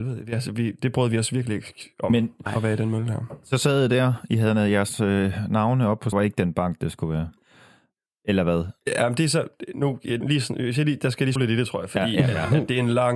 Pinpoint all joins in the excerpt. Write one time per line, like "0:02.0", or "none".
0:06.1
0:10.2
0:11.4

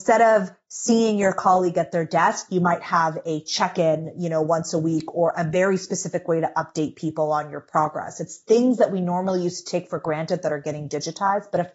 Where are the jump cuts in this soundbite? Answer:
none

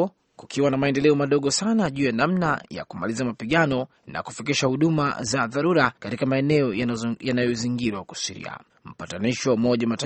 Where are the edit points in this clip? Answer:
0:04.0
0:06.0
0:08.7

